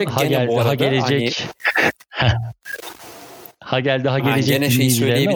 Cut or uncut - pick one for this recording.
uncut